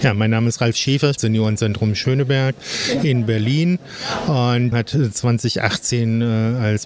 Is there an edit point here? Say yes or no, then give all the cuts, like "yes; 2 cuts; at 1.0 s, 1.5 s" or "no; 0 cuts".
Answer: yes; 2 cuts; at 1.2 s, 4.7 s